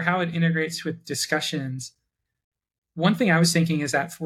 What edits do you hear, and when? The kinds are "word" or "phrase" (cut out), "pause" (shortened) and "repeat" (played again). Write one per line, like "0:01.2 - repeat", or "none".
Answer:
none